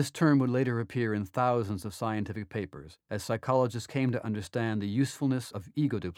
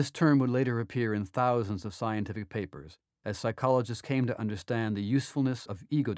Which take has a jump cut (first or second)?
first